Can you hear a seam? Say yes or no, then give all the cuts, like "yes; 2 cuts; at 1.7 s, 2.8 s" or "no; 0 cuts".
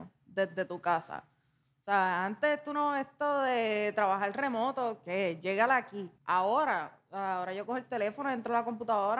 yes; 1 cut; at 6.2 s